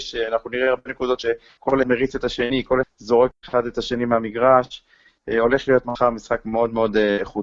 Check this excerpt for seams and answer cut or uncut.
cut